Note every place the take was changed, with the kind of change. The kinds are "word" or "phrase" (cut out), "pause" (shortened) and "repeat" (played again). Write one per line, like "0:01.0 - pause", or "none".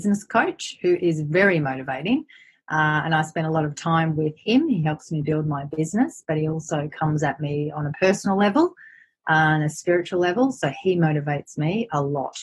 none